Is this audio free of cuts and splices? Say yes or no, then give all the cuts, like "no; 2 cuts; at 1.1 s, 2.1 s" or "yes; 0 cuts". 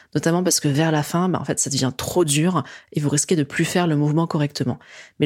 yes; 0 cuts